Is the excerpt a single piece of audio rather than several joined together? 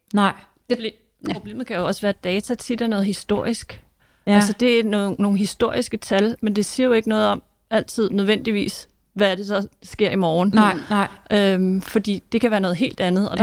yes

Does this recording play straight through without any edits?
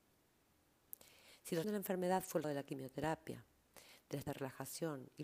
no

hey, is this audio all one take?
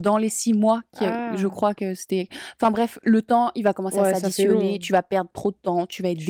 yes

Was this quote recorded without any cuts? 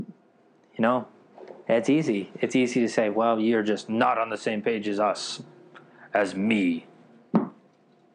yes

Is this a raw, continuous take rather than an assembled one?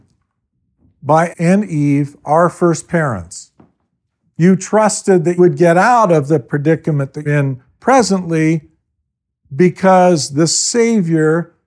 no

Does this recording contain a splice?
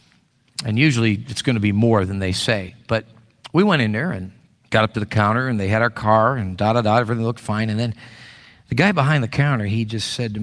yes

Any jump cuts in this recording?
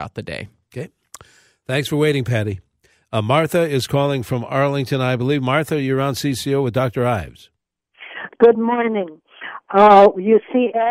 no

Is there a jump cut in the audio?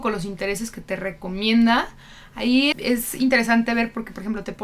yes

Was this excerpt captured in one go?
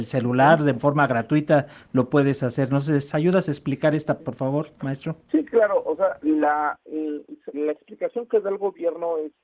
no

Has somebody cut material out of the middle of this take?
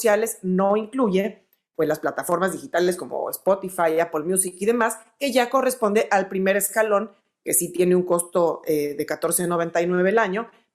no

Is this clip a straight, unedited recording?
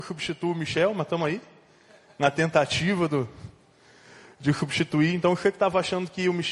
yes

